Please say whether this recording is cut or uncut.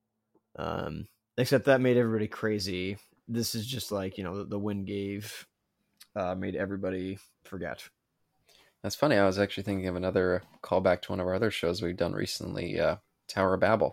uncut